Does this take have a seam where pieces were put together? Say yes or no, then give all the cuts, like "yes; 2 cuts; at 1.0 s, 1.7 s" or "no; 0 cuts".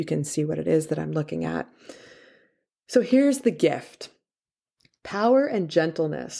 no; 0 cuts